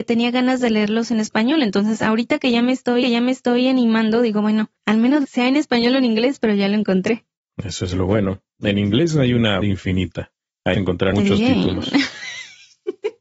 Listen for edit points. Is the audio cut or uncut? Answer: cut